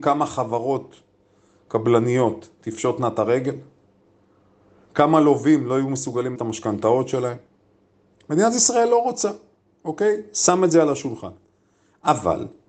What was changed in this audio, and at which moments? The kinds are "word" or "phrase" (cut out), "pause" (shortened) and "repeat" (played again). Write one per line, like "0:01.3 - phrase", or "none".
0:06.4 - word